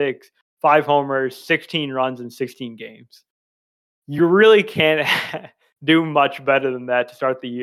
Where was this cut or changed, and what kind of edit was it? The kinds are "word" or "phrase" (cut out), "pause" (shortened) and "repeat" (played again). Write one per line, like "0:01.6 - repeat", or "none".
none